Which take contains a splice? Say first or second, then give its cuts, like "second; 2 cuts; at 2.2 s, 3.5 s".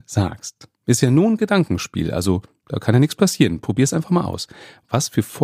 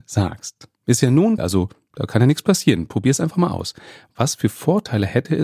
second; 1 cut; at 1.4 s